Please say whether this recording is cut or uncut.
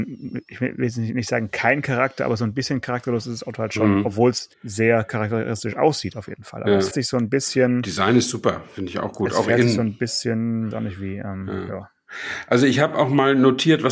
cut